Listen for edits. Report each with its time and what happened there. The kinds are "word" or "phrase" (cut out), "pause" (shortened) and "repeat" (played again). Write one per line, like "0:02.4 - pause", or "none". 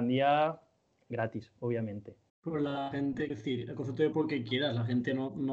0:02.3 - pause
0:03.3 - word
0:04.1 - word